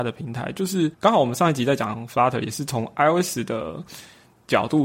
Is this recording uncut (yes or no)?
no